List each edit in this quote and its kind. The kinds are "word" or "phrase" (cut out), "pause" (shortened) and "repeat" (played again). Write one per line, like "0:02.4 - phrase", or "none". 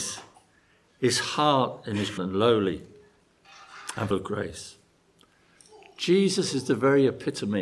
0:02.2 - word
0:04.1 - word